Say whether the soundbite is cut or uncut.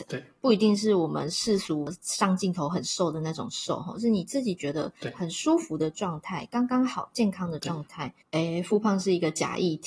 cut